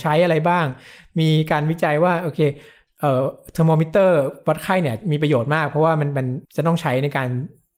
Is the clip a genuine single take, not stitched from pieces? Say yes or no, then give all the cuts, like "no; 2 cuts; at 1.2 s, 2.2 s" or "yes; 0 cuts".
no; 1 cut; at 6.4 s